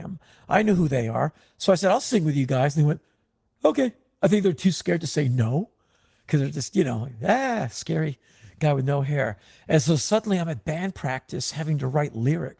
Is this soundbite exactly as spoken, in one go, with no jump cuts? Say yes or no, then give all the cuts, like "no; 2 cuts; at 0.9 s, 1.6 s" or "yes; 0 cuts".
yes; 0 cuts